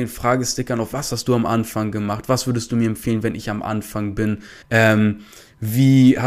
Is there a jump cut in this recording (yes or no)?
yes